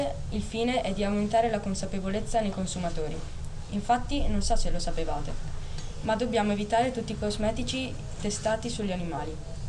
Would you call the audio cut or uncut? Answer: uncut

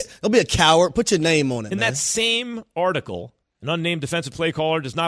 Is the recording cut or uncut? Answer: cut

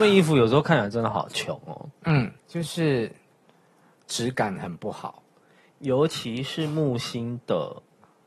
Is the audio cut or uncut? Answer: cut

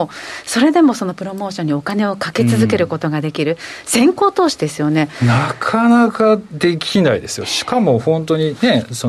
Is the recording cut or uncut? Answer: uncut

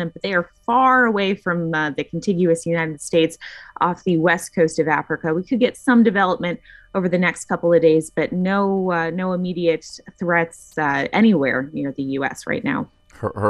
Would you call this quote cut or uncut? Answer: uncut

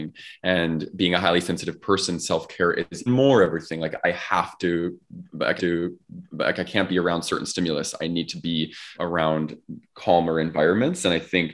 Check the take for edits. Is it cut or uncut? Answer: cut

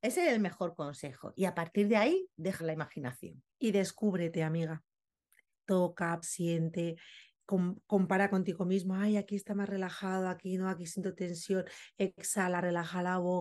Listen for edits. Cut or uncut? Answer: cut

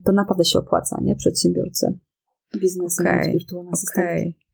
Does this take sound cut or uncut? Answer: uncut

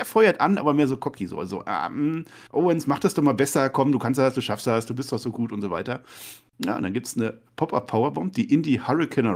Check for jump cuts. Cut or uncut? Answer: cut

